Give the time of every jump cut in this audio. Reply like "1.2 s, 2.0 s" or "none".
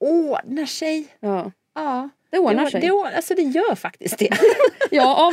2.2 s